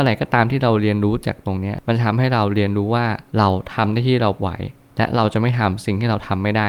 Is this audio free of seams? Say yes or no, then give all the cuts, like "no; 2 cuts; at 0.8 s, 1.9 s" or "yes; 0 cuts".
no; 1 cut; at 3.3 s